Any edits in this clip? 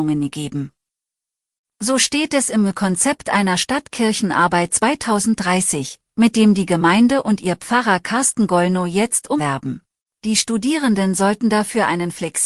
yes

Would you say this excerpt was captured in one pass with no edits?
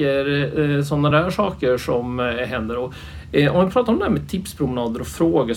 yes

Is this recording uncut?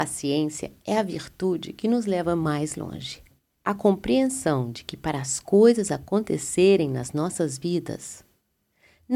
yes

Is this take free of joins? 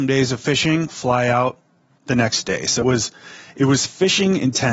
no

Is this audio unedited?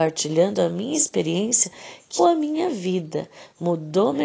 no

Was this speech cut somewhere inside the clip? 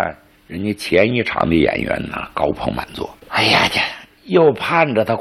yes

